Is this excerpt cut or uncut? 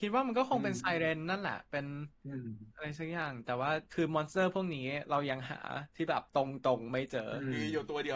cut